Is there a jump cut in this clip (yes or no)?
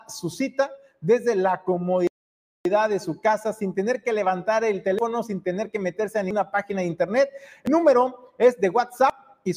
no